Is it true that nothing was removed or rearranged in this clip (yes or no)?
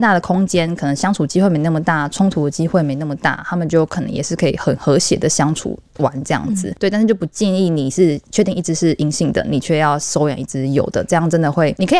yes